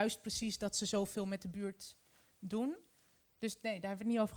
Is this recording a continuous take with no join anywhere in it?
yes; 0 cuts

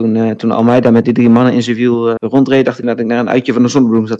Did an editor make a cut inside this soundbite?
yes; 3 cuts; at 1.0 s, 2.2 s, 2.8 s

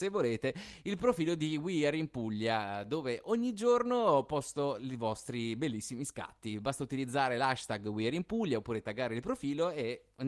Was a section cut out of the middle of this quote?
no; 0 cuts

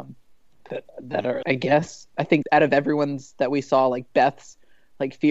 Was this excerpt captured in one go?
no; 2 cuts; at 1.4 s, 2.4 s

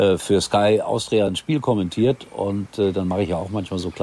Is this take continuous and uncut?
yes; 0 cuts

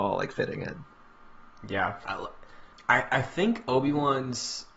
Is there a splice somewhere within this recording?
yes; 2 cuts; at 2.0 s, 2.7 s

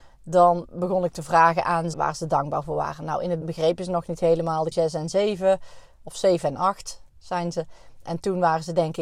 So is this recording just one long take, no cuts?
no; 4 cuts; at 1.9 s, 3.4 s, 4.7 s, 7.1 s

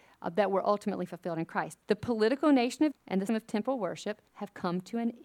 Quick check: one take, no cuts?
no; 4 cuts; at 1.8 s, 2.9 s, 3.3 s, 4.3 s

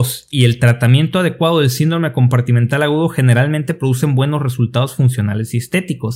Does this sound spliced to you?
no; 0 cuts

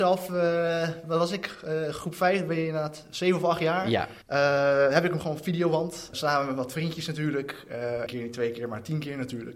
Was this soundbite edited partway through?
yes; 4 cuts; at 4.2 s, 5.2 s, 6.1 s, 8.1 s

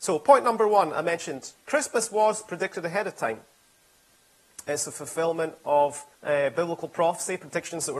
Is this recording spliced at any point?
yes; 1 cut; at 6.1 s

